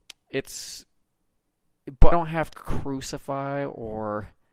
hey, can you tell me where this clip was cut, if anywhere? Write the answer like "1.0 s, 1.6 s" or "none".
2.1 s, 2.5 s